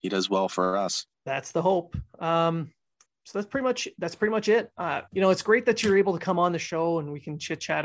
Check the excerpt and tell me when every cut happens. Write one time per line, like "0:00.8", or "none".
0:01.1
0:03.1
0:05.1